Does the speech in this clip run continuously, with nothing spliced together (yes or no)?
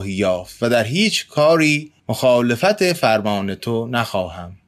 no